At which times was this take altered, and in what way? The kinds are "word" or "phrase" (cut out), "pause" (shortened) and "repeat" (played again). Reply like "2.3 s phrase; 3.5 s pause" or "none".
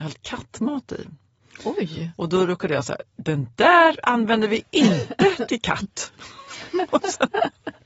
none